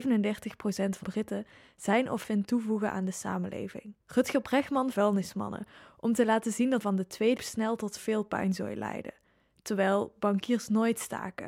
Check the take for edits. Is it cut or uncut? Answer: cut